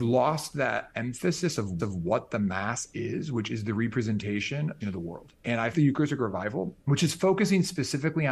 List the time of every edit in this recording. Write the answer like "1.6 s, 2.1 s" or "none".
1.8 s, 2.9 s, 4.8 s, 5.4 s, 5.7 s, 6.8 s